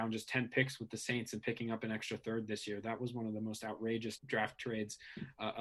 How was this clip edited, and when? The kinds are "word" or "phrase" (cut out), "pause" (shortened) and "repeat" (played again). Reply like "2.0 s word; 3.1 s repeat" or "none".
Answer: 4.2 s word

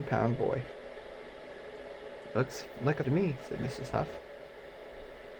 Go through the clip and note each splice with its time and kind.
3.0 s phrase

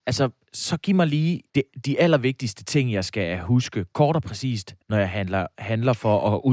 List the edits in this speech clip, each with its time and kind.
1.5 s pause; 4.8 s pause

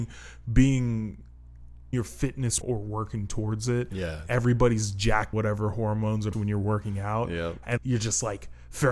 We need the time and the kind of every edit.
1.9 s word; 2.6 s word; 5.3 s word; 6.3 s word; 7.8 s word

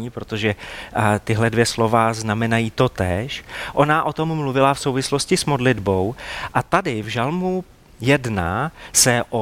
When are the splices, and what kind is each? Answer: none

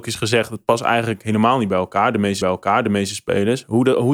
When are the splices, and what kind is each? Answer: 2.4 s repeat

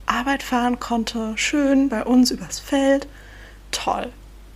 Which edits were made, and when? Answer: 1.9 s word

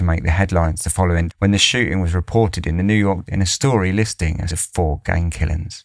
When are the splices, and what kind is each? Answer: 1.3 s word; 3.3 s word; 4.5 s word

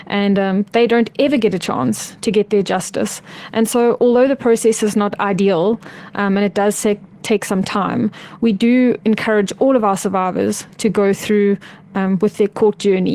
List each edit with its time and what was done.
none

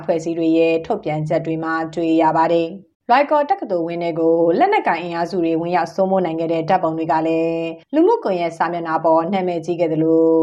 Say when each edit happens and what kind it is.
2.9 s pause; 7.8 s pause

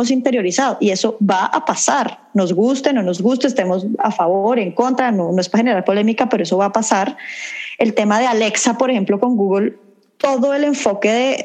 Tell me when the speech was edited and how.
none

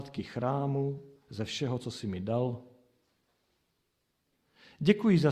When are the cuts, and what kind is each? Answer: none

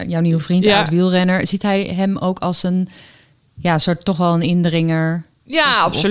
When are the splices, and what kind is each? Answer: none

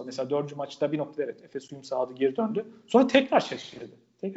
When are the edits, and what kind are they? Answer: none

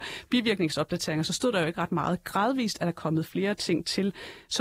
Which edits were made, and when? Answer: none

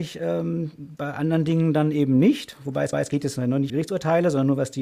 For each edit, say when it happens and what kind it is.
2.9 s repeat; 3.7 s word

